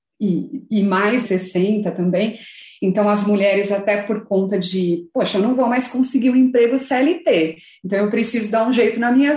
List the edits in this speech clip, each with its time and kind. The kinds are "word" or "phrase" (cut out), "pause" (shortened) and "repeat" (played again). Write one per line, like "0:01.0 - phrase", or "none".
0:01.2 - word